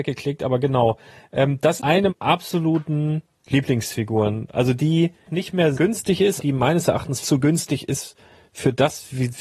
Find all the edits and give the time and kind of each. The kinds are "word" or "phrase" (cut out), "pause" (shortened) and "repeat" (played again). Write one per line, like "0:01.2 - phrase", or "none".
0:01.8 - word
0:02.1 - word
0:05.3 - word
0:05.7 - word
0:06.4 - word
0:07.2 - word